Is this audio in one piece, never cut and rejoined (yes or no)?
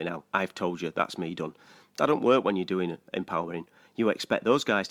yes